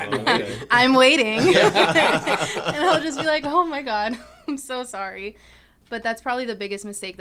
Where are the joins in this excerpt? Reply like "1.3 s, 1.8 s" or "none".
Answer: none